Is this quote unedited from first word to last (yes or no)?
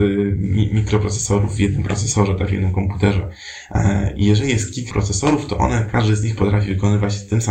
no